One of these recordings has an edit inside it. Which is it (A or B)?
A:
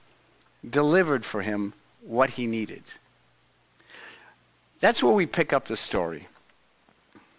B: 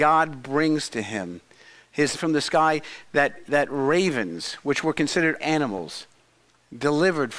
B